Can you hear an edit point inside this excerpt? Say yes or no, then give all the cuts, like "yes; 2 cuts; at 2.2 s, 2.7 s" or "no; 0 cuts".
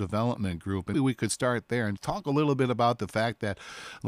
yes; 2 cuts; at 0.9 s, 2.0 s